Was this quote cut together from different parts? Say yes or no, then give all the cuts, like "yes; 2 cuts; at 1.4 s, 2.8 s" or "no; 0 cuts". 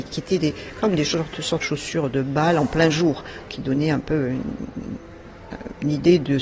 yes; 2 cuts; at 1.6 s, 3.5 s